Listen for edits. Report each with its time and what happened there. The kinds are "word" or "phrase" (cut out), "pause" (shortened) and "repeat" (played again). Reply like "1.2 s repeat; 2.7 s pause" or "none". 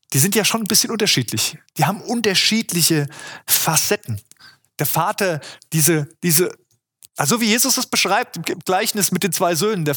4.4 s pause